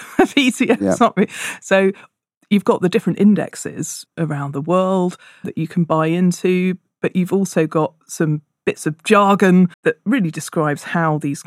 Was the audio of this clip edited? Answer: yes; 3 cuts; at 4.1 s, 5.4 s, 9.7 s

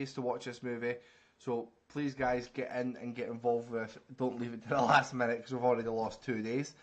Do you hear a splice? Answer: no; 0 cuts

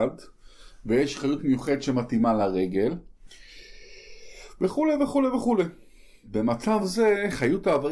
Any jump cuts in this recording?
no; 0 cuts

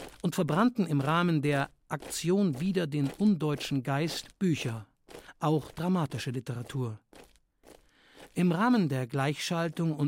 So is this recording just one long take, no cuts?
yes; 0 cuts

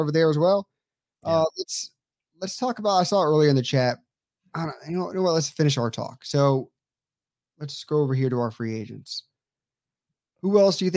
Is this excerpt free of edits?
yes; 0 cuts

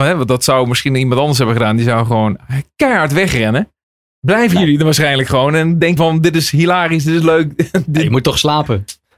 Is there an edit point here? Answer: yes; 1 cut; at 6.0 s

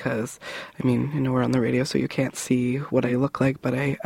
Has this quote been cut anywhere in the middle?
no; 0 cuts

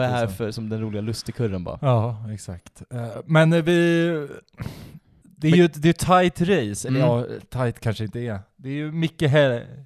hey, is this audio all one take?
no; 1 cut; at 5.2 s

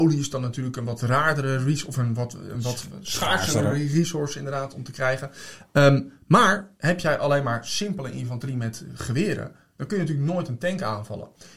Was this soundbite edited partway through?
no; 0 cuts

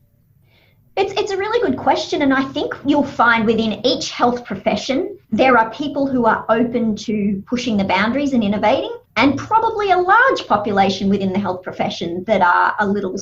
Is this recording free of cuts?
no; 2 cuts; at 5.2 s, 9.0 s

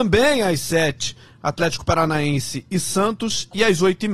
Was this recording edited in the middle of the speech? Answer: no; 0 cuts

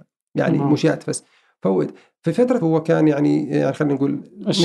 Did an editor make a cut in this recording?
yes; 1 cut; at 2.6 s

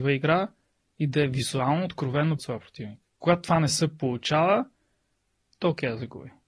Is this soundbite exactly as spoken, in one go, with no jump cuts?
no; 1 cut; at 2.4 s

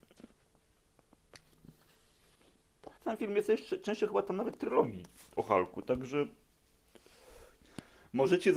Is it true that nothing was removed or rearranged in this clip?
no; 2 cuts; at 3.0 s, 5.3 s

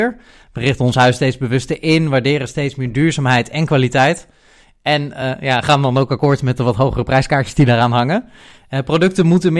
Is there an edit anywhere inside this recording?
no; 0 cuts

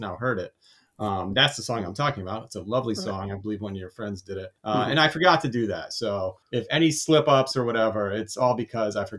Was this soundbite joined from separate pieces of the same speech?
yes; 2 cuts; at 4.6 s, 6.4 s

